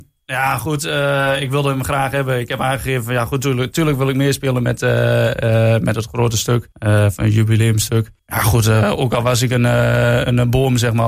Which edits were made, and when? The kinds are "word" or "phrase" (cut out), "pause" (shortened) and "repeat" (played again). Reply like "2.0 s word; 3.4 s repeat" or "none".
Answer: 6.7 s pause; 8.2 s pause